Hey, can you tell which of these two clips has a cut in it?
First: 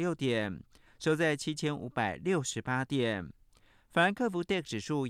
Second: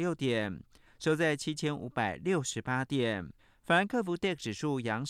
second; 1 cut; at 3.4 s

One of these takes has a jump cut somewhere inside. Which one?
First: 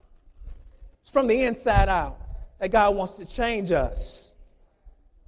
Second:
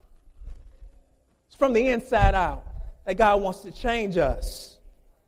first; 1 cut; at 0.9 s

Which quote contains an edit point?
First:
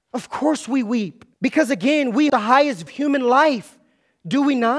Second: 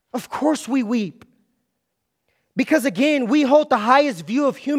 first; 3 cuts; at 1.3 s, 2.3 s, 2.9 s

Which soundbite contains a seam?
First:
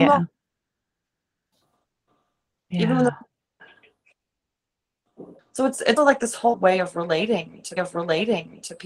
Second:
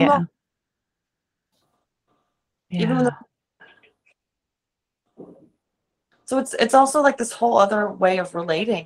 first; 4 cuts; at 5.4 s, 6.0 s, 6.5 s, 7.8 s

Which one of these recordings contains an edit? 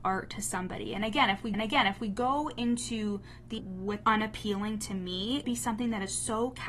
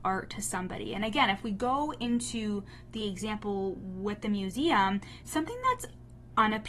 first; 4 cuts; at 1.5 s, 3.6 s, 4.0 s, 5.4 s

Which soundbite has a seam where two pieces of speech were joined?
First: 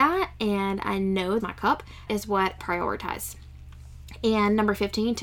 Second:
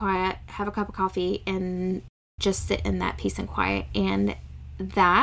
first; 3 cuts; at 1.4 s, 2.1 s, 2.6 s

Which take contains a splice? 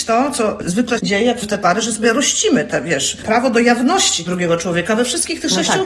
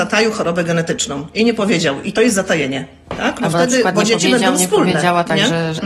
first; 3 cuts; at 1.0 s, 1.4 s, 4.3 s

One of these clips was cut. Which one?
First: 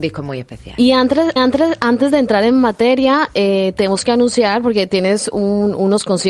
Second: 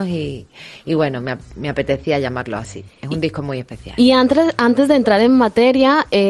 first; 1 cut; at 1.4 s

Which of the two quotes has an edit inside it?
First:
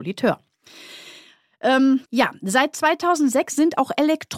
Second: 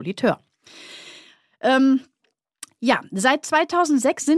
first; 1 cut; at 2.1 s

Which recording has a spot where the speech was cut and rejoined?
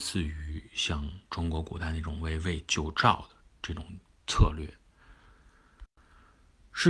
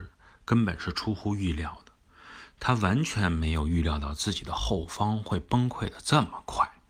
first; 2 cuts; at 1.2 s, 4.1 s

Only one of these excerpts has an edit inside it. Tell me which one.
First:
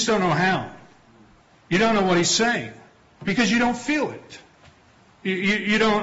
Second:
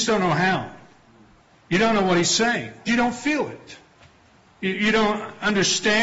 second; 2 cuts; at 2.9 s, 4.7 s

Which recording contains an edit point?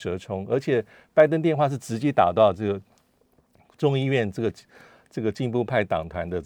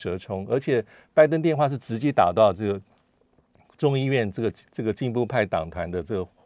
second; 1 cut; at 4.7 s

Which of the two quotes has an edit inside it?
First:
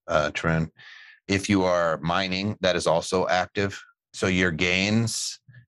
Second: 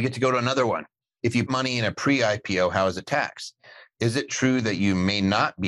second; 1 cut; at 1.5 s

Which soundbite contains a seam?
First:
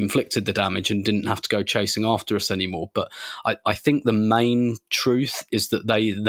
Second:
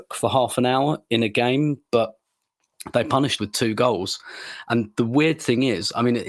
second; 1 cut; at 3.4 s

